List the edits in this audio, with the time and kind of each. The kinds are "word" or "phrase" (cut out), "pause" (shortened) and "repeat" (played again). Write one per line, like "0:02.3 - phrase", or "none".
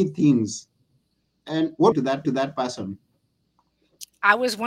0:01.9 - phrase
0:02.2 - repeat